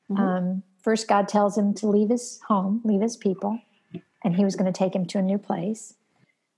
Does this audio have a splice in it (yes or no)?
no